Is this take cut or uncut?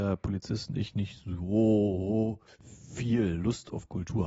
cut